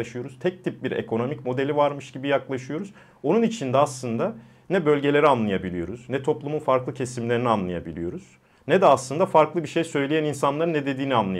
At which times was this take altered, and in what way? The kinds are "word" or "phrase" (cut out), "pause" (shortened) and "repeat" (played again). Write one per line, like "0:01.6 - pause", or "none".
none